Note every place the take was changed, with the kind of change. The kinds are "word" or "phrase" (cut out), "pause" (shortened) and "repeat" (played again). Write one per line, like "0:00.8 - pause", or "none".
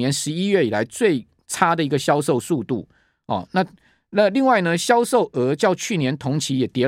none